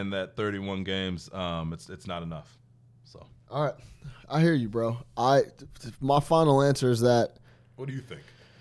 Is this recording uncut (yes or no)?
yes